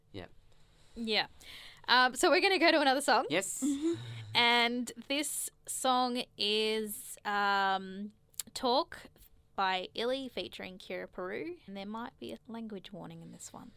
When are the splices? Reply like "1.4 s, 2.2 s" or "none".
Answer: 9.5 s, 11.7 s, 12.4 s